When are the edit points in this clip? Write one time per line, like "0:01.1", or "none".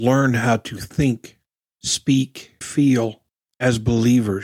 0:01.7
0:02.6